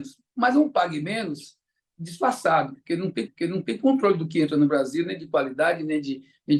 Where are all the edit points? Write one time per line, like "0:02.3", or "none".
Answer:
0:03.3